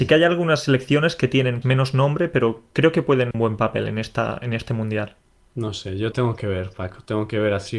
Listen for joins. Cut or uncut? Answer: cut